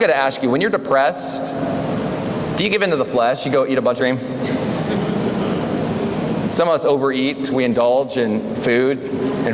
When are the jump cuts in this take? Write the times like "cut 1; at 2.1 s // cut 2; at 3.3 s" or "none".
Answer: cut 1; at 4.0 s